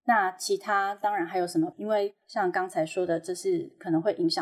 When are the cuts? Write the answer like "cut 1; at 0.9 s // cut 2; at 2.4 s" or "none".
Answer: cut 1; at 1.7 s // cut 2; at 2.2 s